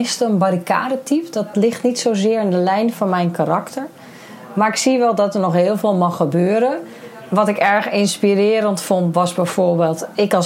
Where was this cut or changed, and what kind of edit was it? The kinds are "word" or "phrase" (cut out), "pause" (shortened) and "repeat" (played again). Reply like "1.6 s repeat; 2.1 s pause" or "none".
1.5 s word